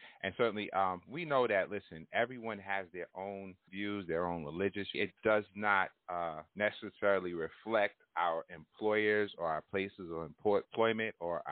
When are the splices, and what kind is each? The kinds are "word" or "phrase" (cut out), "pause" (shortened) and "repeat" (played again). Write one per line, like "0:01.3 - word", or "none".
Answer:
0:03.7 - phrase
0:04.9 - phrase
0:06.5 - pause